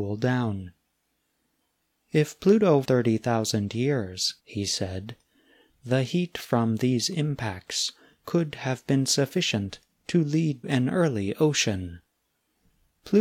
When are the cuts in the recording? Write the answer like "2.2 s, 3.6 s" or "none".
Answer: 2.8 s, 4.4 s, 10.6 s